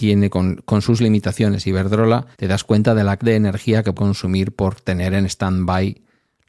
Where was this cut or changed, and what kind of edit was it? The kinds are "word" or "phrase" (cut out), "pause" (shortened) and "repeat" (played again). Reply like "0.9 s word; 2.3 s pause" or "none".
2.3 s pause; 3.2 s word; 3.9 s word

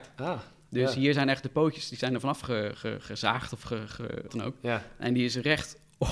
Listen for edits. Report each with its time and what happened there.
4.3 s phrase

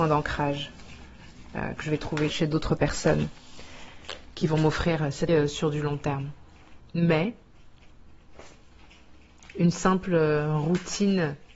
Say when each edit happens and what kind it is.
2.3 s word; 5.3 s word; 6.8 s pause

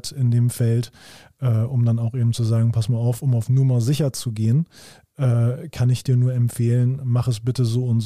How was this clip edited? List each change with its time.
none

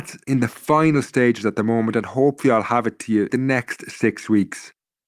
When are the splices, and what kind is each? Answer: 3.3 s phrase

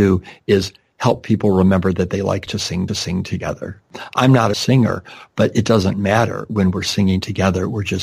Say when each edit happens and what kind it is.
2.9 s repeat; 4.5 s phrase

